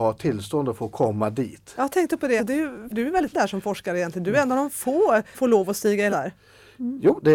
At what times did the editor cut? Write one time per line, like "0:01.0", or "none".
0:02.4
0:02.9
0:03.3
0:05.3
0:06.1